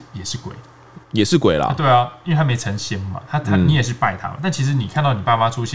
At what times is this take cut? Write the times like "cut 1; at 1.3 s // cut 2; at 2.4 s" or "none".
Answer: cut 1; at 1.0 s